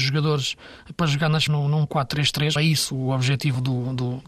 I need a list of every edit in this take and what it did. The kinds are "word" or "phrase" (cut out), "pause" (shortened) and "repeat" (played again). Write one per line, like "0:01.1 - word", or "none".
0:01.5 - word
0:02.6 - phrase